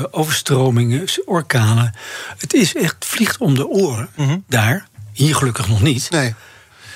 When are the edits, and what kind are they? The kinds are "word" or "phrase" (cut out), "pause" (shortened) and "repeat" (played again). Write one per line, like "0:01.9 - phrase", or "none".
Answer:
none